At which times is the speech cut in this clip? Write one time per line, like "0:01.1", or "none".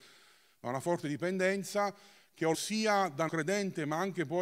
0:02.5
0:03.3